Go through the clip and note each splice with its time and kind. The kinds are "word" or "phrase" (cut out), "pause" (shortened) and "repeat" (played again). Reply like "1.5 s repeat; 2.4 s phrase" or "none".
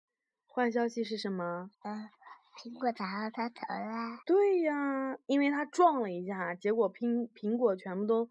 1.7 s pause; 4.2 s pause